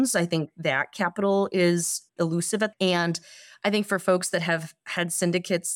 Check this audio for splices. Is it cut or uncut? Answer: cut